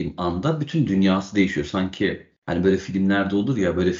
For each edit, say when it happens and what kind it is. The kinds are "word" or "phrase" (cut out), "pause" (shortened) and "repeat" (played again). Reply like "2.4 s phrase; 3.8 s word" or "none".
2.4 s pause